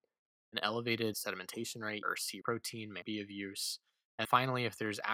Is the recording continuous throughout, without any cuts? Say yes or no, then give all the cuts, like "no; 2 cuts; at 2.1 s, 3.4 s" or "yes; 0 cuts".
no; 5 cuts; at 1.1 s, 2.0 s, 2.4 s, 3.0 s, 4.2 s